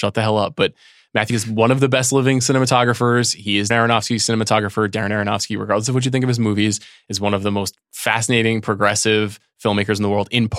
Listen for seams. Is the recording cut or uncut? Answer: cut